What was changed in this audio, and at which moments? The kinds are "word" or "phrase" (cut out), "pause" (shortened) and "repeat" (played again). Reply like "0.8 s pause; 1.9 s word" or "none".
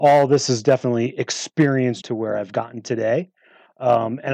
2.0 s word